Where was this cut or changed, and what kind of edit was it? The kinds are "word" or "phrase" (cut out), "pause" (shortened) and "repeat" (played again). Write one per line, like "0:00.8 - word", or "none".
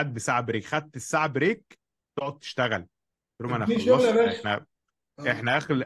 none

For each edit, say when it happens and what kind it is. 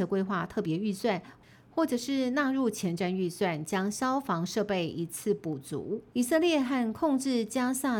0:06.1 - pause

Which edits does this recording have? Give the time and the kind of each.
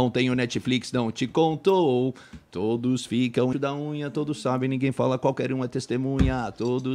0:03.5 - word

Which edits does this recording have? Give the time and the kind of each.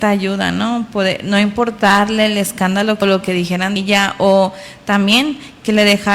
0:03.0 - word
0:03.8 - word

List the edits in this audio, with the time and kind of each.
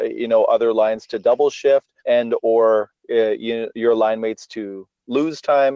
0:02.0 - pause

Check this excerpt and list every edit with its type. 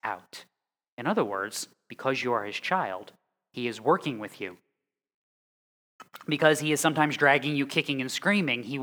none

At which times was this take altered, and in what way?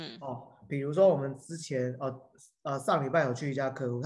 none

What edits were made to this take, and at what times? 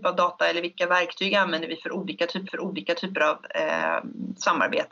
0:02.4 - repeat

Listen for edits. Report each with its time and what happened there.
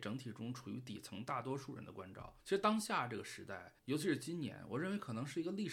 0:02.4 - pause
0:03.8 - pause

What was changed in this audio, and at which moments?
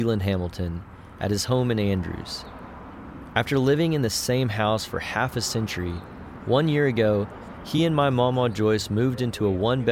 none

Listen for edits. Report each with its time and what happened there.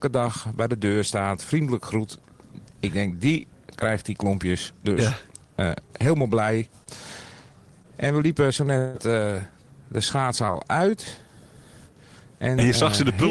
none

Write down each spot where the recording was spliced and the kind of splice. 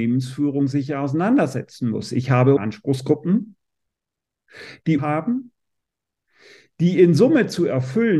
0:02.6 - word
0:05.0 - phrase

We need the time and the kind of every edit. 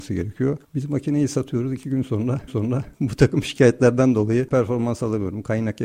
0:02.5 - repeat
0:04.5 - word

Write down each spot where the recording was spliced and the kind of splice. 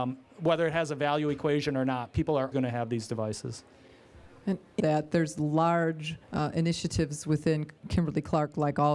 0:02.5 - word
0:04.8 - phrase
0:06.2 - pause

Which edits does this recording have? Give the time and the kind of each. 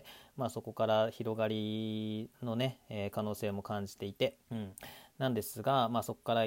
0:02.3 - pause
0:04.4 - pause

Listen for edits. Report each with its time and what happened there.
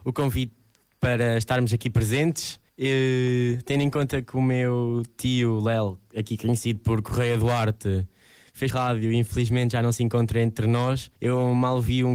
0:02.7 - pause
0:08.7 - phrase
0:11.2 - pause

